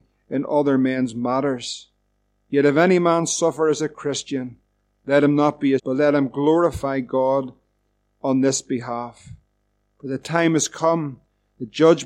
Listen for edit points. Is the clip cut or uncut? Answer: cut